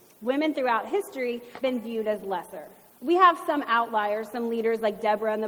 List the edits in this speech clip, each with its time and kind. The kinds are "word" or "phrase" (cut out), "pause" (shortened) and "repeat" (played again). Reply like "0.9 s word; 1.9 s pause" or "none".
1.6 s word; 2.9 s pause